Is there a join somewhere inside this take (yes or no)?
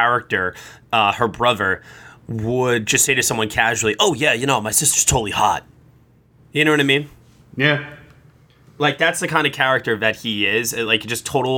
no